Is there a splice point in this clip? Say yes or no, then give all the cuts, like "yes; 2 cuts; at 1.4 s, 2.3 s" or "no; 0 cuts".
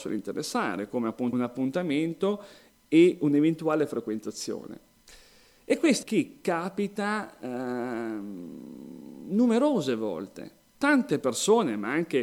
yes; 2 cuts; at 1.3 s, 6.0 s